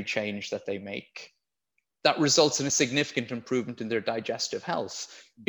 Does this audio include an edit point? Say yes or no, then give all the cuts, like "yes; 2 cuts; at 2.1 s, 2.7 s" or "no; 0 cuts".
no; 0 cuts